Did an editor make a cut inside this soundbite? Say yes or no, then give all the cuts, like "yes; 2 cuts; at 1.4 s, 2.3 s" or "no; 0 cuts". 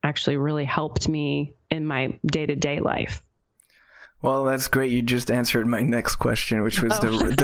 no; 0 cuts